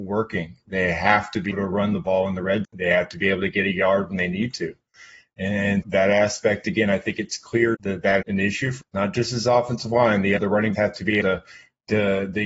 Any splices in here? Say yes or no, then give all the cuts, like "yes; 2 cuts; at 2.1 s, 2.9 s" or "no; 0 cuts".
yes; 9 cuts; at 1.5 s, 2.6 s, 5.8 s, 7.7 s, 8.2 s, 8.8 s, 10.4 s, 10.7 s, 11.2 s